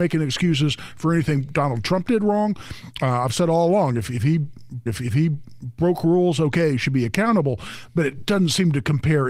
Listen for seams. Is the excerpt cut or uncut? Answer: cut